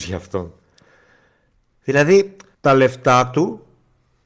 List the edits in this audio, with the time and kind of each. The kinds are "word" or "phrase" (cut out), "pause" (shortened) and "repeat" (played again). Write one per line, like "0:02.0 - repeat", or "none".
0:02.5 - pause

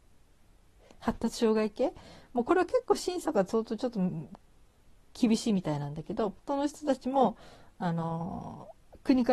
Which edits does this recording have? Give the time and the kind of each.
0:06.4 - pause

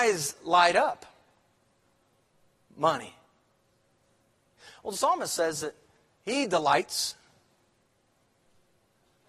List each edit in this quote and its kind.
none

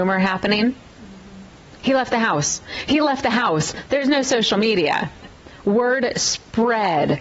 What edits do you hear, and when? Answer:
none

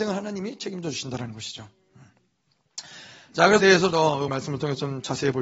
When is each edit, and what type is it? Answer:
0:03.6 - phrase
0:03.9 - word
0:04.3 - word

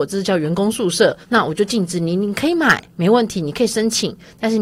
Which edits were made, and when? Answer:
0:01.2 - pause

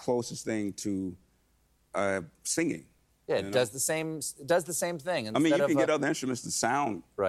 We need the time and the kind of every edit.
none

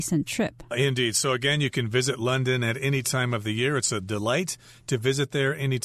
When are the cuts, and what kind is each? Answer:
none

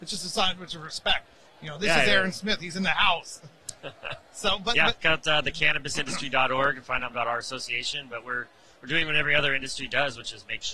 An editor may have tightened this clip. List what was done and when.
0:05.0 - word
0:07.1 - word

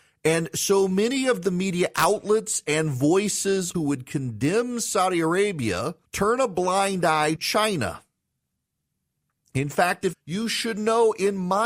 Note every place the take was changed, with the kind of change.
0:03.7 - phrase
0:06.0 - pause
0:07.4 - word
0:10.1 - word

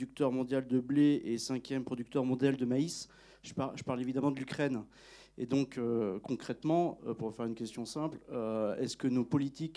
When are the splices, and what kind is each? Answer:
none

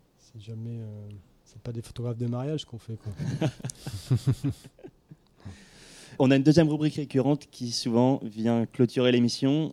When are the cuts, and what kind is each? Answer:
0:01.4 - pause
0:06.2 - word

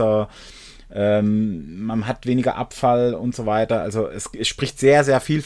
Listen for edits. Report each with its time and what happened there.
none

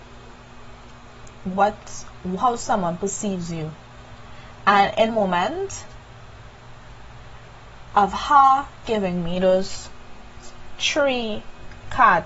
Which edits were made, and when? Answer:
0:05.1 - word
0:08.8 - word

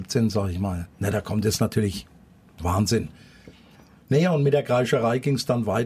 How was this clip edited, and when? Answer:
0:00.9 - pause

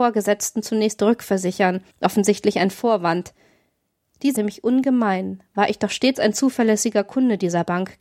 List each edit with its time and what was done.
0:01.9 - pause
0:04.4 - phrase

